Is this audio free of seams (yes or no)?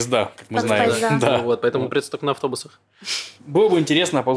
yes